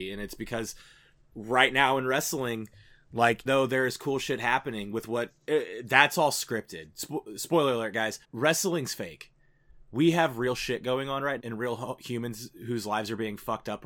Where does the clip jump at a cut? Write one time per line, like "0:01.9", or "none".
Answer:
0:03.5
0:05.4
0:08.2
0:11.4

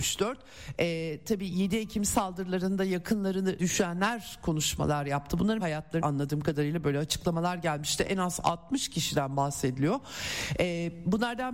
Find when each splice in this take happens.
0:03.6
0:05.6
0:06.0

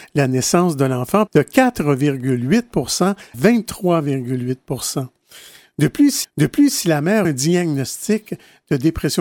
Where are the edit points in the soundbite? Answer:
0:01.3
0:03.3
0:06.2
0:07.2

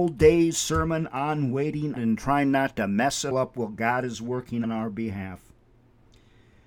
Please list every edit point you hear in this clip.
0:02.0
0:03.3
0:04.6

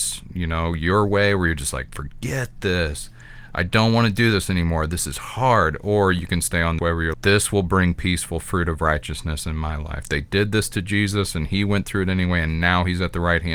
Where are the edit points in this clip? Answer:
0:06.8
0:07.1

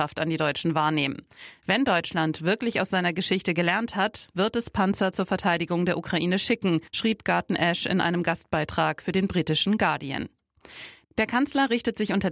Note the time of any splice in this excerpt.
0:06.9

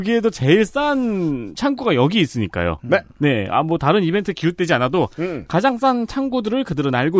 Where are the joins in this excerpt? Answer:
none

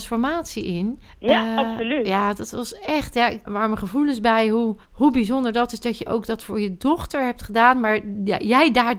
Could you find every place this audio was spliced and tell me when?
0:01.1
0:03.5
0:04.8

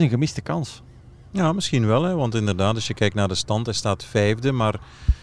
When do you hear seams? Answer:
none

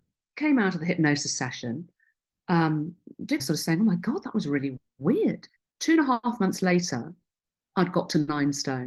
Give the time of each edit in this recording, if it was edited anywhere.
0:03.4
0:05.6

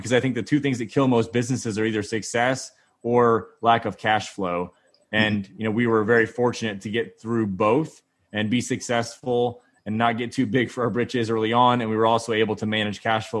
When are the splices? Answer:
none

